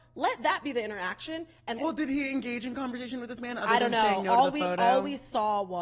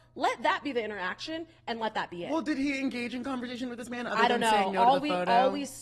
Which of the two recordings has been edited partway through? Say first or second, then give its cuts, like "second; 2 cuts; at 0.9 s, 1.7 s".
first; 1 cut; at 1.8 s